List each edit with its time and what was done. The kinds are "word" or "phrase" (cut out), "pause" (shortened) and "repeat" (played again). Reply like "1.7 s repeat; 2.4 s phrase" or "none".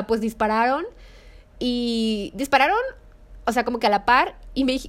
none